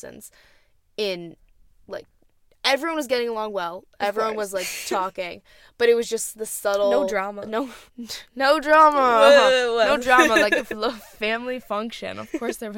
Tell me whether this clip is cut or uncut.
cut